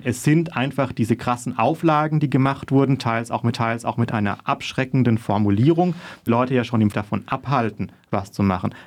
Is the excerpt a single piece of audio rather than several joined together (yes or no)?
no